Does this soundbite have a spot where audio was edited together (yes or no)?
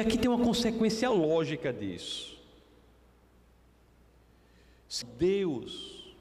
yes